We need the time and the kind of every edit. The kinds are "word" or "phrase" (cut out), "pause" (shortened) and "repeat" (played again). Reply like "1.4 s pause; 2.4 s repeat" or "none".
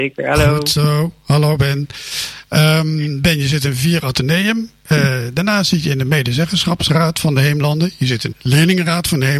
8.3 s word

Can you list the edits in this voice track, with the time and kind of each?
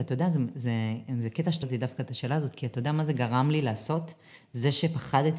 1.6 s word

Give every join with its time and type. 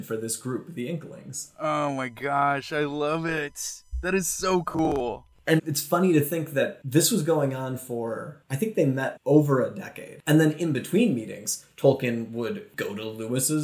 5.6 s word; 9.2 s phrase

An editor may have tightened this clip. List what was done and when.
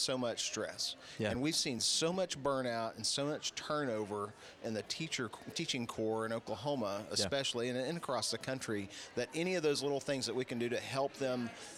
none

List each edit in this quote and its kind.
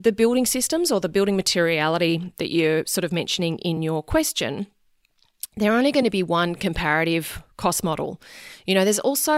none

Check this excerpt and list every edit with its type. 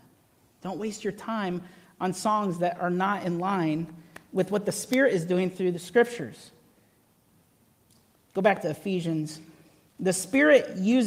none

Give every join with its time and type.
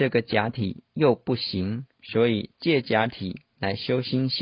1.9 s pause

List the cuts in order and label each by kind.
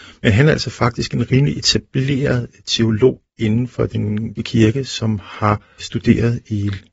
4.4 s word

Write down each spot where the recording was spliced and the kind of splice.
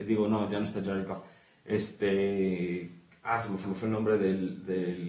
3.6 s repeat

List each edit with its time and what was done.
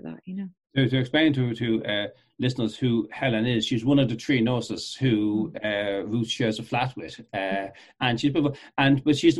none

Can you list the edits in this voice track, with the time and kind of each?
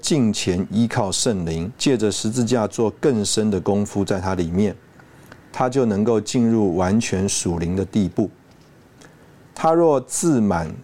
1.8 s pause

